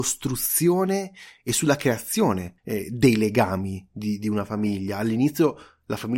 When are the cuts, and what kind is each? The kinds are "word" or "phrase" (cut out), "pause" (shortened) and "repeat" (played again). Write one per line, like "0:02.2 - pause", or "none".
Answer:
0:02.6 - pause

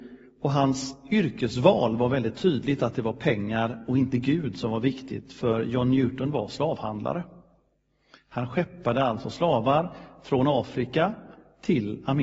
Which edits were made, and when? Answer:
none

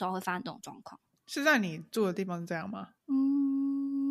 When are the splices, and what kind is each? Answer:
0:01.1 - pause
0:03.0 - pause

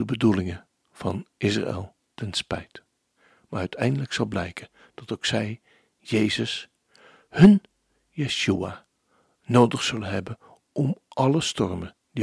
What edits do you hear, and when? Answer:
none

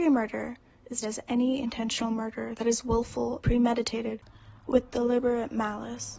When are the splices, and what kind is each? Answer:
0:01.0 - word
0:03.4 - word
0:04.6 - pause

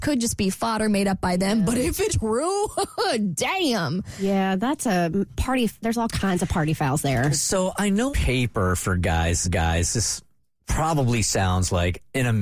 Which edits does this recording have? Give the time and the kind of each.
0:02.1 - word
0:05.3 - word
0:08.1 - word
0:09.4 - repeat

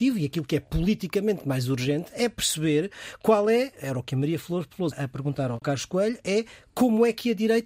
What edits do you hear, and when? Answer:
0:04.9 - word

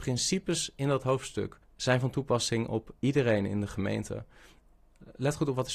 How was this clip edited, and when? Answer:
0:01.6 - pause
0:03.0 - pause

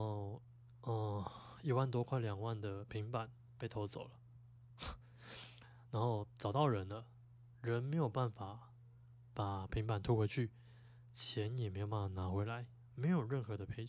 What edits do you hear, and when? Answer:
none

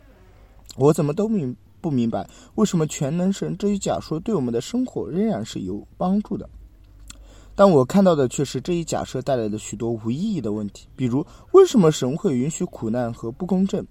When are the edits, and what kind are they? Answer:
0:05.9 - pause

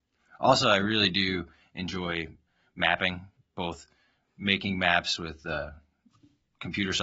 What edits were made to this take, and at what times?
none

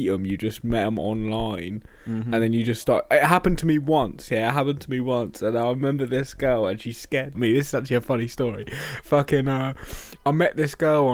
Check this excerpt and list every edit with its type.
0:07.3 - phrase

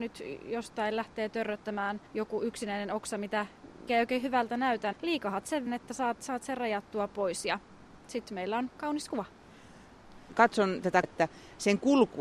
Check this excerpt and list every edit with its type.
0:02.1 - pause
0:03.9 - word
0:04.9 - word
0:05.7 - word
0:11.0 - word

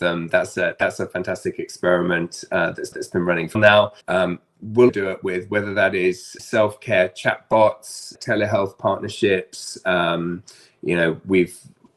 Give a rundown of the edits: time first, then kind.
0:02.9 - repeat
0:03.5 - phrase
0:04.0 - pause
0:04.9 - word
0:06.4 - word
0:08.1 - word

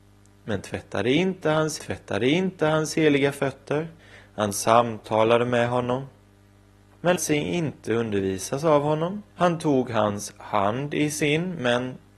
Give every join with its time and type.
0:01.8 - repeat
0:04.0 - pause
0:07.2 - word
0:09.3 - pause

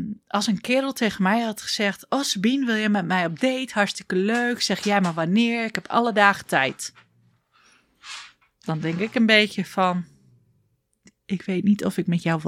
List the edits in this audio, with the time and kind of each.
none

